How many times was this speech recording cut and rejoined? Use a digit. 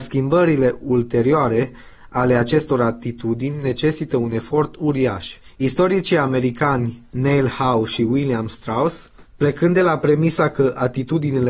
0